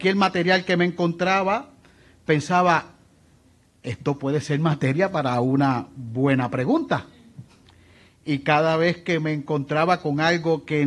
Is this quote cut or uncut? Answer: uncut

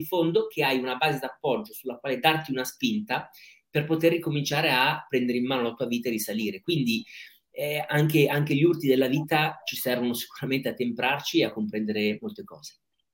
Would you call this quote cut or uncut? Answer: uncut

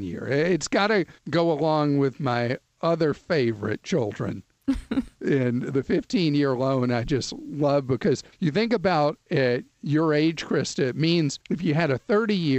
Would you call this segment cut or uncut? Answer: cut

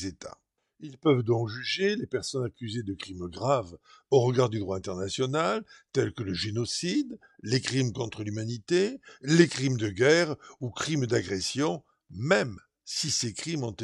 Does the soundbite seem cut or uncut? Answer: uncut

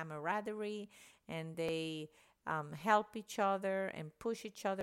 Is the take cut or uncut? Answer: uncut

